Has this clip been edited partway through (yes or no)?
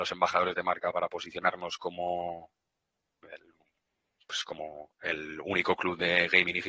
no